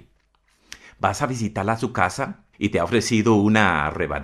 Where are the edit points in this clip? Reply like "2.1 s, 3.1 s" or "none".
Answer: 2.5 s